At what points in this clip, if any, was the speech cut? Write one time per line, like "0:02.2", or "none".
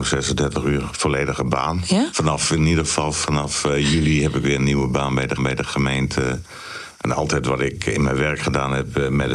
0:05.4